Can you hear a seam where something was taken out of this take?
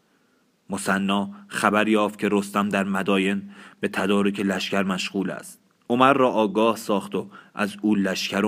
yes; 1 cut; at 5.8 s

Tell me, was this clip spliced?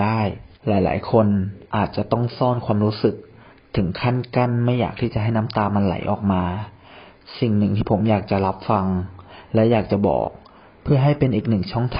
yes; 1 cut; at 1.7 s

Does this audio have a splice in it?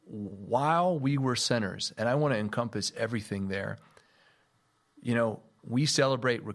yes; 1 cut; at 1.3 s

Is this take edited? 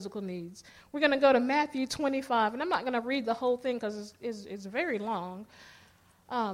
no; 0 cuts

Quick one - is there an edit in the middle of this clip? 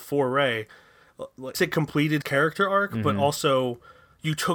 yes; 2 cuts; at 1.5 s, 2.2 s

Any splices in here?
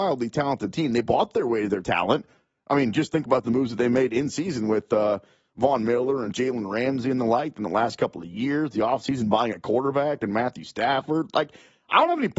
no; 0 cuts

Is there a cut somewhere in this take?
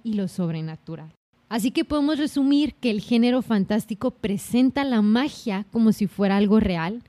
yes; 1 cut; at 1.3 s

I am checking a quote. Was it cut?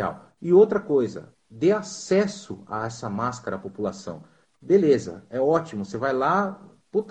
no; 0 cuts

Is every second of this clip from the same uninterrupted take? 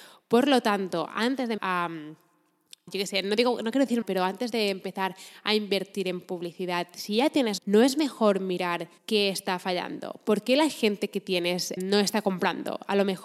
no; 6 cuts; at 1.6 s, 2.9 s, 4.0 s, 7.6 s, 9.0 s, 11.8 s

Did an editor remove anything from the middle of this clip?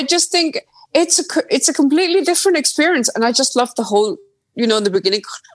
no; 0 cuts

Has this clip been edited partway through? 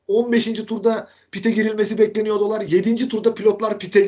no; 0 cuts

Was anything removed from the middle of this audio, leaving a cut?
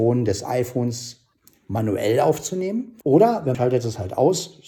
yes; 2 cuts; at 3.0 s, 3.5 s

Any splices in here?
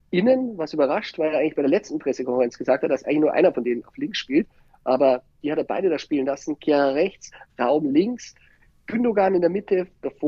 no; 0 cuts

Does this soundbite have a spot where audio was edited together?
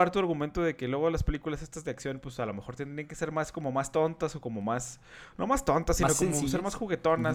no; 0 cuts

